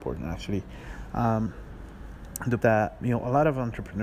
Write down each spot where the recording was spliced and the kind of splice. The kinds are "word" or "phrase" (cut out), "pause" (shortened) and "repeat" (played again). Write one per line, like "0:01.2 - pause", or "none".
0:02.6 - phrase
0:03.0 - word